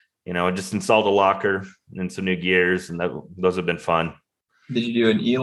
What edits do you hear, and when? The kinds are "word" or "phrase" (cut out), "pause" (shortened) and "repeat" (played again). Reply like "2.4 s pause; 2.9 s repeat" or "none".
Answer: none